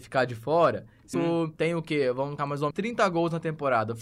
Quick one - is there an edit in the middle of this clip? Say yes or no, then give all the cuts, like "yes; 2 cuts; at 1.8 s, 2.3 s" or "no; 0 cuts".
yes; 4 cuts; at 1.1 s, 1.6 s, 2.4 s, 2.7 s